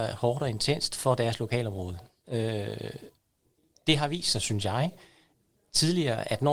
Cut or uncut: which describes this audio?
uncut